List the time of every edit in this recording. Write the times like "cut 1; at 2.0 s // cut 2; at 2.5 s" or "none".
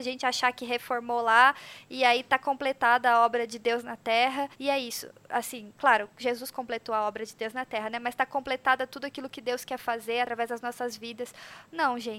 cut 1; at 4.5 s